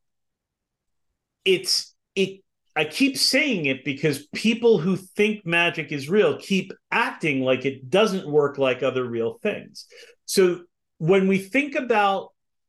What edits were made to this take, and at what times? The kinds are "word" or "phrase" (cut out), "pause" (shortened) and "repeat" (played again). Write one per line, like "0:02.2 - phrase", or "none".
0:02.0 - pause